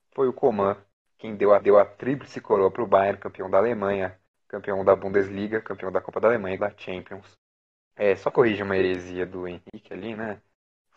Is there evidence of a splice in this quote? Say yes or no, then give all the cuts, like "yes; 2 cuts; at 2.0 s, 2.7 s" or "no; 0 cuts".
yes; 4 cuts; at 1.6 s, 4.3 s, 6.6 s, 8.3 s